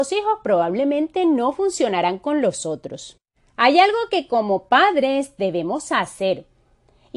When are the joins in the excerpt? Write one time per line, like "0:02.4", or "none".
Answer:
none